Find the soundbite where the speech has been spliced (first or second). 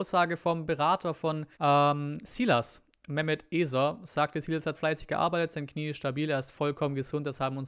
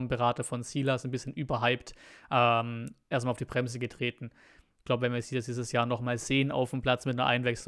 first